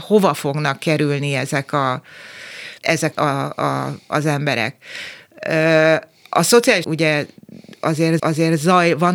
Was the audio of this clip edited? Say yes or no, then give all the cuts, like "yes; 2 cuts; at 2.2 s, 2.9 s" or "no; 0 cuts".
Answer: yes; 4 cuts; at 2.8 s, 3.1 s, 6.8 s, 8.2 s